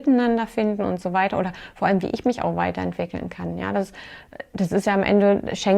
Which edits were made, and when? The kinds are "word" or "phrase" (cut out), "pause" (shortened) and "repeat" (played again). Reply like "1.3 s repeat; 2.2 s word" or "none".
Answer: none